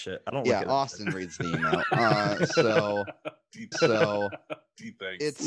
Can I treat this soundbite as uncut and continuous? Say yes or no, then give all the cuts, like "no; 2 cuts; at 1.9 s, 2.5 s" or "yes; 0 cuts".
no; 1 cut; at 3.7 s